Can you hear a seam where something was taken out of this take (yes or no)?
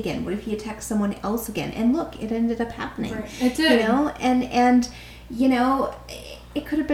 no